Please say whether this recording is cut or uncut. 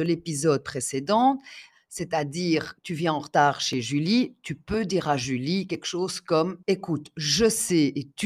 cut